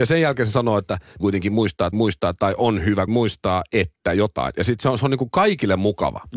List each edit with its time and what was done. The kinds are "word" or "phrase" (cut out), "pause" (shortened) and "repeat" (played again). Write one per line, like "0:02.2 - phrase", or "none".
0:01.2 - word
0:01.9 - repeat
0:03.1 - word